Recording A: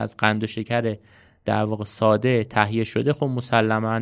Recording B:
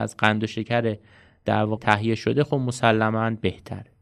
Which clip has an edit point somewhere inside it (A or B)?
B